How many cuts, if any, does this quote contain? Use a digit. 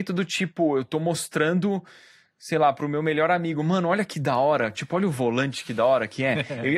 0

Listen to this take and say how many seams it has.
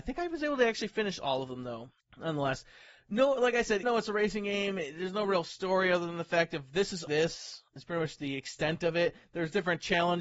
4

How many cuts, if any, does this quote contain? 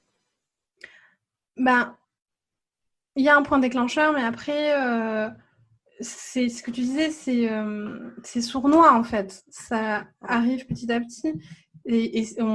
0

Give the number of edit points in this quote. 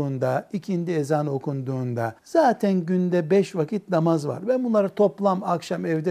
1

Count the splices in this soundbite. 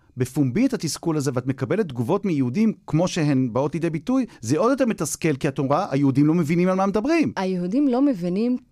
1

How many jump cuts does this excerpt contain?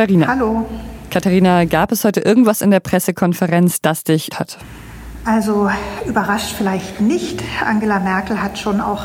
1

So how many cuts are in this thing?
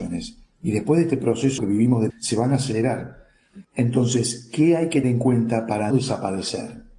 5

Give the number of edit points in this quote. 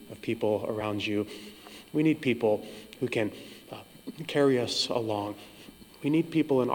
0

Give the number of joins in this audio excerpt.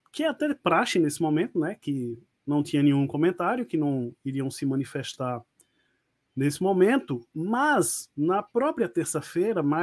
0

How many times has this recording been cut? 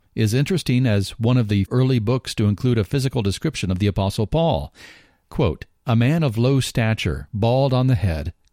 1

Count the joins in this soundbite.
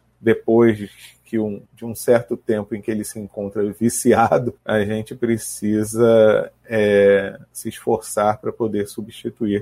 2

